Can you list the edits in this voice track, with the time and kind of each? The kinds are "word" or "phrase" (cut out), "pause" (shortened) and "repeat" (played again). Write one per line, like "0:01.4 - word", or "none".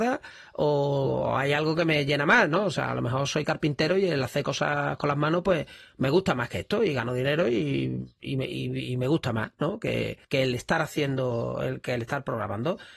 0:10.2 - pause